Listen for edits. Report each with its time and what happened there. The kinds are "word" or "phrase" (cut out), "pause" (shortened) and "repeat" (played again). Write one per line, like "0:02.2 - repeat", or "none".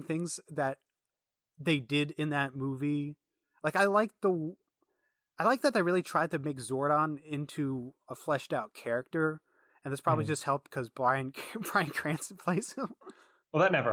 none